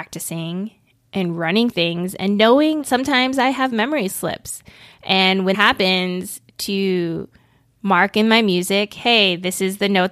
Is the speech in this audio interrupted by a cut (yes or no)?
yes